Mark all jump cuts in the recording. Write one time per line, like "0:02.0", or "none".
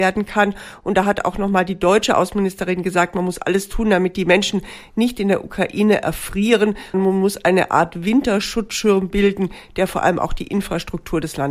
0:06.9